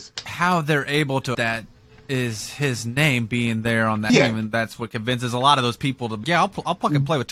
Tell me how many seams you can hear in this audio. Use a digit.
3